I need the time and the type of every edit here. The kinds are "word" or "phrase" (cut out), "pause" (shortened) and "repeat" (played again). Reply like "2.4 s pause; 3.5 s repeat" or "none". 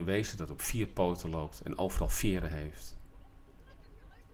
none